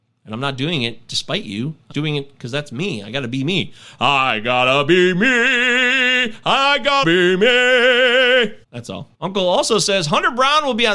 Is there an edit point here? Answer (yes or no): yes